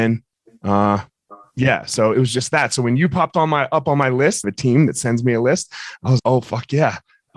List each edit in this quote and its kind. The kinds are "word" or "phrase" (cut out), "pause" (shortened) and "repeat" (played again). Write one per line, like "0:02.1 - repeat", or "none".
0:02.1 - word
0:04.4 - phrase
0:06.2 - word